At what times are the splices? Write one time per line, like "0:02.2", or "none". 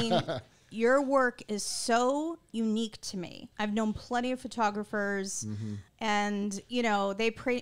0:03.5
0:05.9